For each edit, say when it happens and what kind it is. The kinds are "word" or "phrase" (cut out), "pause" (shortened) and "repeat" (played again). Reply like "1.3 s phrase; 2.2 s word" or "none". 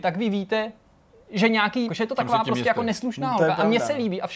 1.9 s phrase